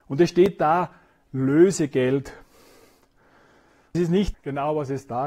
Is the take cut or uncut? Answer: cut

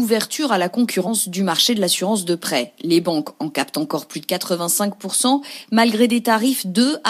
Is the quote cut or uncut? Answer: uncut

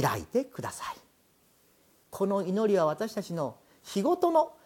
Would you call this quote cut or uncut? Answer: uncut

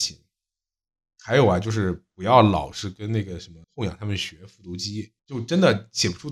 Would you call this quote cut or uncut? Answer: cut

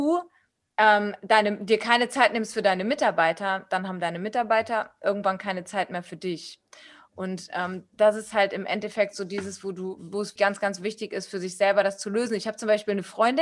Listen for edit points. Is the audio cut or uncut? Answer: cut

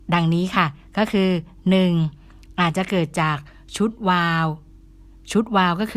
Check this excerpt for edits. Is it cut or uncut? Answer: uncut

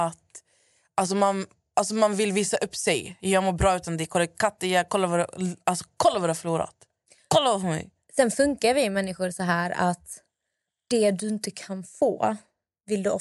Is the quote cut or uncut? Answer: uncut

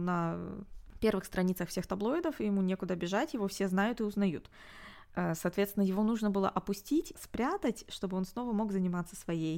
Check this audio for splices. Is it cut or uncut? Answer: cut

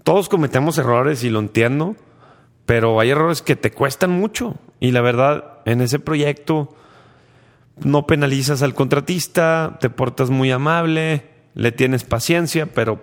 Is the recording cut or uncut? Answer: uncut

